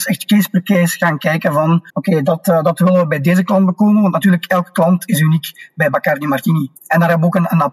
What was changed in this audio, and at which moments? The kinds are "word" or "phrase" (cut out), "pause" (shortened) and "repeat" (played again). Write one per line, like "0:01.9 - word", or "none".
0:01.9 - pause
0:06.8 - pause